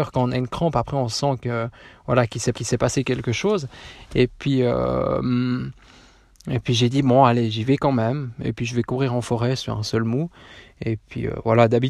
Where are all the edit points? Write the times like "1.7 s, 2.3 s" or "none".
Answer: 2.5 s